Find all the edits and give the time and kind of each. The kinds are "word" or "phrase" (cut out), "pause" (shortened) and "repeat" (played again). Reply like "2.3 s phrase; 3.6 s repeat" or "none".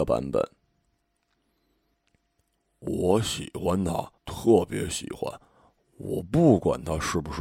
4.2 s pause